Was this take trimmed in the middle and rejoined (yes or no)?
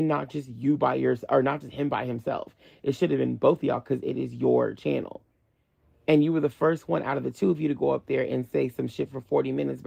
no